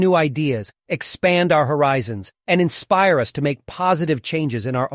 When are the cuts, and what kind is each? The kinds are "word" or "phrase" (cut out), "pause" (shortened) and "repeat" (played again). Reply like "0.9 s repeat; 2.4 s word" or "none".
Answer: 2.4 s pause